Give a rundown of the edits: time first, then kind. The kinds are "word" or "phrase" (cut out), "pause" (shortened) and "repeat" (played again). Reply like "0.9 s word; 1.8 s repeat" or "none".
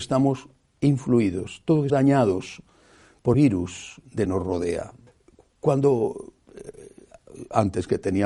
1.9 s word; 3.3 s word; 4.2 s phrase; 5.1 s pause